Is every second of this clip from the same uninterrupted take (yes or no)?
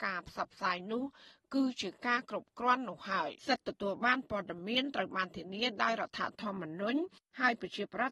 no